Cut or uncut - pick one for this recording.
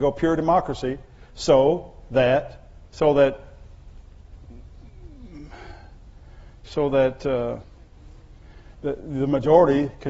cut